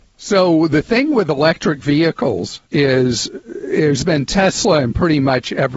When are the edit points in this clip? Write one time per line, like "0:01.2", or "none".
0:02.7